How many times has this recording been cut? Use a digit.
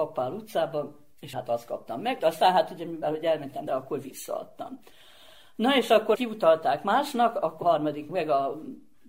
7